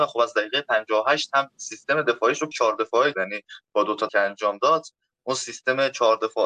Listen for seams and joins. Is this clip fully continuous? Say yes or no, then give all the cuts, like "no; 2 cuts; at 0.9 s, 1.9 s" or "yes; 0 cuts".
no; 4 cuts; at 1.5 s, 2.5 s, 3.1 s, 4.1 s